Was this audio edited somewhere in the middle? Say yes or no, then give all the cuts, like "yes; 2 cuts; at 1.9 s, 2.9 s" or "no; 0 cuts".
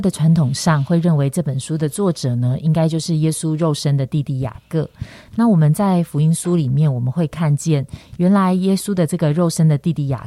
no; 0 cuts